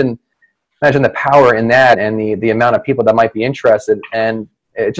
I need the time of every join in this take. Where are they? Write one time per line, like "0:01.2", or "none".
0:01.9